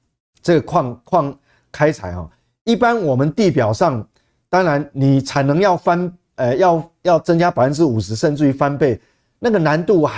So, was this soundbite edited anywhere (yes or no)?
no